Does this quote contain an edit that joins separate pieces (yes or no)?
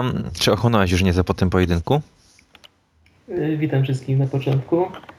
no